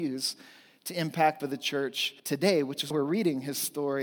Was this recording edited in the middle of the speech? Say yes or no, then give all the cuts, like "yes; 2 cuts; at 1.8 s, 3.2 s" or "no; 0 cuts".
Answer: yes; 3 cuts; at 1.4 s, 2.2 s, 2.9 s